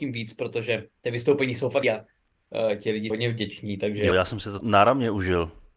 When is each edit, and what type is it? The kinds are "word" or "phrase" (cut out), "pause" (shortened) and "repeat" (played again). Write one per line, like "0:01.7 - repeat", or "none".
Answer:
0:01.0 - pause
0:01.8 - word
0:03.1 - word
0:04.1 - word
0:04.6 - word

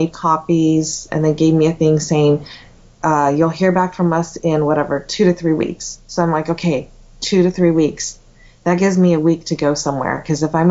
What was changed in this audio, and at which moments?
none

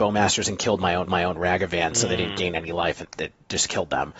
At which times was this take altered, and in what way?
0:01.1 - repeat
0:03.0 - word

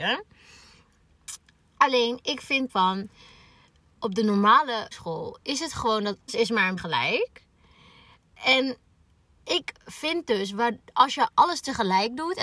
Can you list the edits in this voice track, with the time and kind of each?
0:02.7 - word
0:04.9 - word
0:06.3 - word
0:06.8 - word

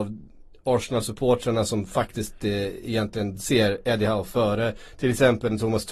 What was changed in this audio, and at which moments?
none

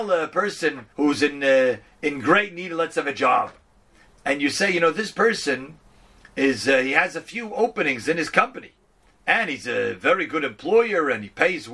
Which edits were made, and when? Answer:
0:00.9 - pause

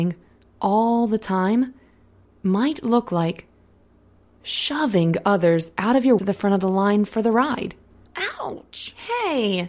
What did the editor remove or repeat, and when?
0:06.2 - phrase

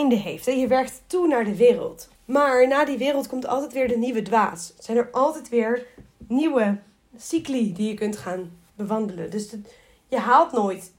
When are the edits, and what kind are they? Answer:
0:02.1 - pause

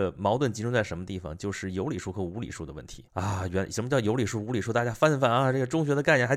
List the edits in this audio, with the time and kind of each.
0:03.1 - pause

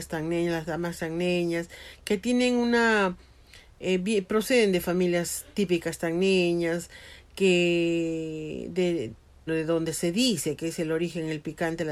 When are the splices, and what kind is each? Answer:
0:09.5 - word

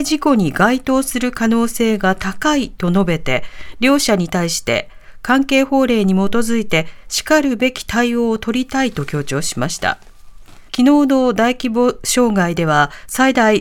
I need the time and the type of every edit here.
0:10.7 - pause

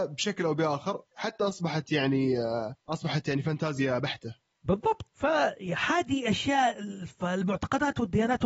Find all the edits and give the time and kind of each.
0:01.1 - pause
0:02.8 - pause
0:05.1 - word

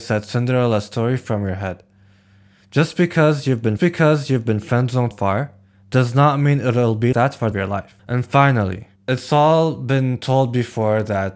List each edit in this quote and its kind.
0:03.8 - repeat
0:05.1 - word
0:07.1 - word
0:07.5 - phrase
0:08.0 - pause
0:09.0 - pause

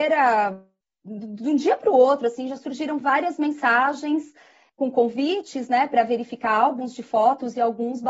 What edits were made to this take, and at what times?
none

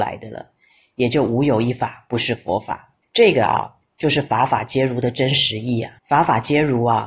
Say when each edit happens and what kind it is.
0:03.0 - pause
0:06.0 - pause

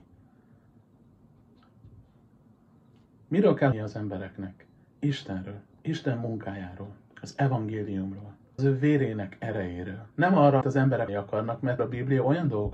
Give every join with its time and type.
0:03.7 - word
0:04.8 - pause
0:08.6 - word
0:10.1 - pause
0:10.6 - word
0:11.1 - word
0:11.8 - word

